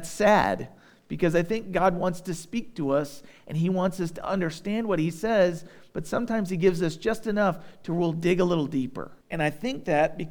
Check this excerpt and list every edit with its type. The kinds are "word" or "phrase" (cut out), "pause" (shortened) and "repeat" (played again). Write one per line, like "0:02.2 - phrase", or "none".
0:09.2 - pause